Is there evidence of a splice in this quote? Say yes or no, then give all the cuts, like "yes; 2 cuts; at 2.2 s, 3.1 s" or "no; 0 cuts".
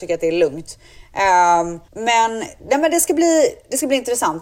yes; 1 cut; at 1.9 s